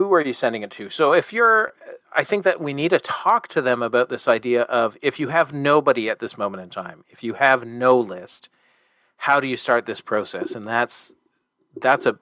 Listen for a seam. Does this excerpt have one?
no; 0 cuts

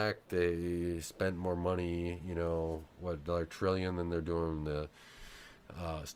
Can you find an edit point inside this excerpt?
no; 0 cuts

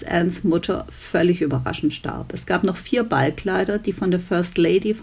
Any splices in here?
no; 0 cuts

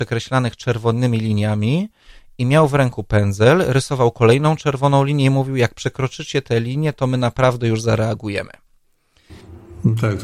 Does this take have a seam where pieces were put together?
no; 0 cuts

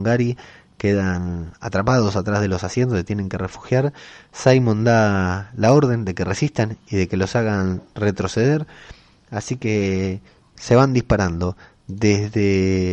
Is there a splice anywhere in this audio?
no; 0 cuts

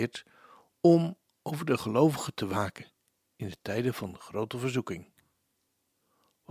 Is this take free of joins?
yes; 0 cuts

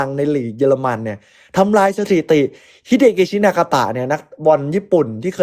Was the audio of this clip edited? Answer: no; 0 cuts

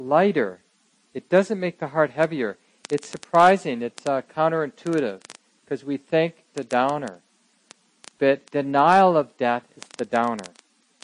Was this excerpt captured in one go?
no; 2 cuts; at 6.5 s, 8.5 s

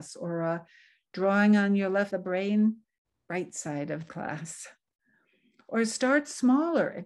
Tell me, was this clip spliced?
yes; 3 cuts; at 2.1 s, 3.0 s, 4.1 s

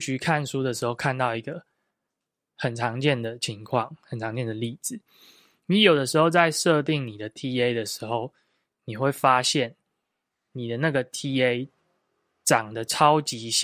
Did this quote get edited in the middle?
no; 0 cuts

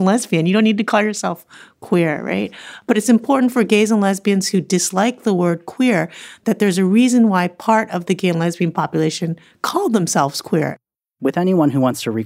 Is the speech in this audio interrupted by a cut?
no; 0 cuts

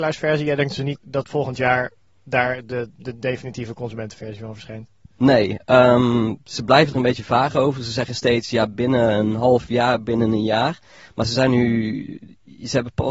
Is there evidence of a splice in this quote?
yes; 1 cut; at 1.0 s

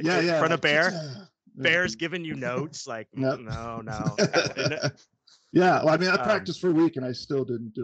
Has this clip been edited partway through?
no; 0 cuts

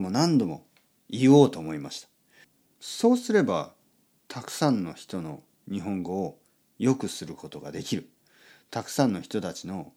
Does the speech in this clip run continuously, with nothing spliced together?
yes; 0 cuts

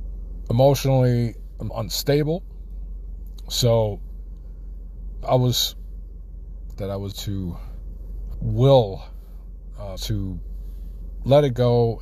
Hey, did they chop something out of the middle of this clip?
yes; 6 cuts; at 1.7 s, 5.2 s, 6.7 s, 7.1 s, 8.3 s, 10.0 s

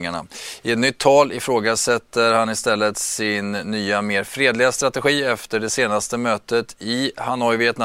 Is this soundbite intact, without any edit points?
yes; 0 cuts

